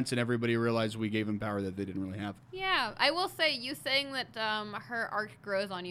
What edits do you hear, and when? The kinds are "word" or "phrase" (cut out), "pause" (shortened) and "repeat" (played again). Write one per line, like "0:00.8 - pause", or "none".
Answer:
none